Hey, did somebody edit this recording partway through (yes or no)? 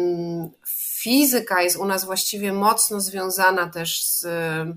no